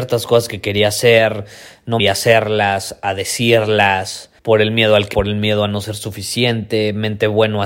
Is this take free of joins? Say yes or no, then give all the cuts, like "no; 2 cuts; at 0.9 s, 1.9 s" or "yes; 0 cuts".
no; 3 cuts; at 2.0 s, 4.4 s, 5.1 s